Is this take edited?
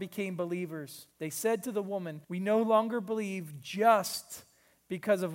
yes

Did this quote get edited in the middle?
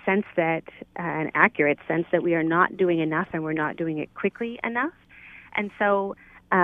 no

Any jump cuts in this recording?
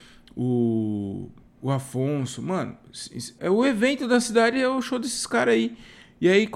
yes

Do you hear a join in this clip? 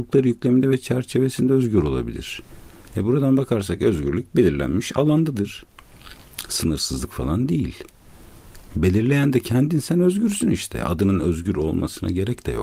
no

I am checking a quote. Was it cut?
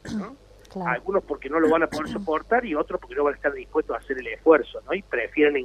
no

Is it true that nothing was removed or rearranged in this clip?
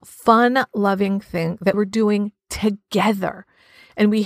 no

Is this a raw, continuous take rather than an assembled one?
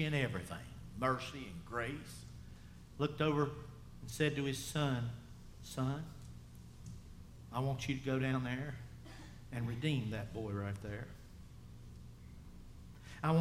yes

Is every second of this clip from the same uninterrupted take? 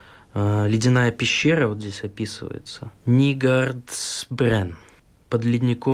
no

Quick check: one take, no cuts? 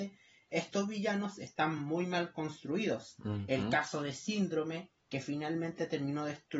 yes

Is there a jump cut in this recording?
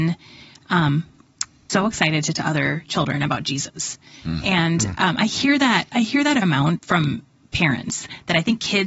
yes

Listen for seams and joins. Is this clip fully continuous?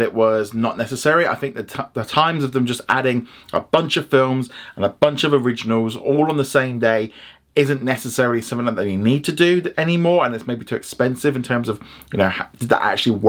yes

